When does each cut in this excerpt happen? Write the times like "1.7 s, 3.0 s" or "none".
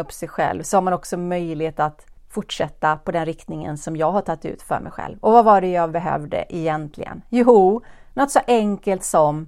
2.2 s